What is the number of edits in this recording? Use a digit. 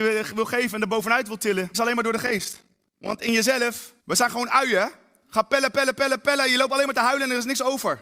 3